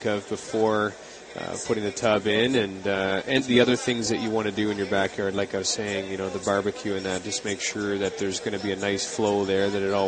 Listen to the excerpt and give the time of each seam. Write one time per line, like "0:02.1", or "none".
0:03.4